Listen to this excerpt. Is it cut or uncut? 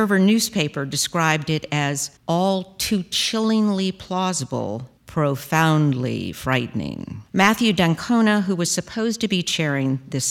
cut